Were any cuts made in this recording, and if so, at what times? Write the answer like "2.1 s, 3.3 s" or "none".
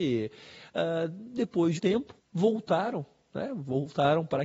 1.8 s, 2.2 s